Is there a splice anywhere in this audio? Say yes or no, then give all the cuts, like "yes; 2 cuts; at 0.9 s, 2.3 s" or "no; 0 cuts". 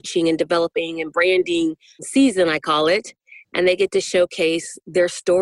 no; 0 cuts